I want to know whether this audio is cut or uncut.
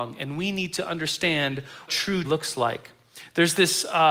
cut